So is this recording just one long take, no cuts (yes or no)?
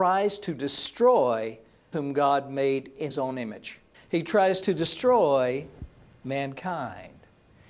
no